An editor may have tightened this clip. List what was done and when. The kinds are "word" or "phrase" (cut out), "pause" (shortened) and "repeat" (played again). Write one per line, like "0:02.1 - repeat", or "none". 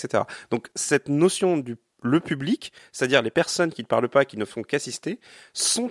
none